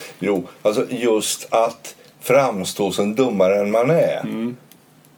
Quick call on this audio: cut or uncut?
uncut